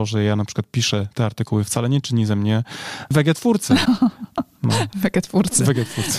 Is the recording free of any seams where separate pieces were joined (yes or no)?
yes